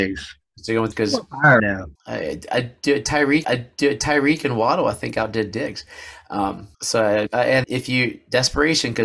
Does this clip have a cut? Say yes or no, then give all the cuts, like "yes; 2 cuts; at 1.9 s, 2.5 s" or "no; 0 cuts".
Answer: yes; 7 cuts; at 0.9 s, 1.6 s, 2.0 s, 3.4 s, 6.7 s, 7.3 s, 7.6 s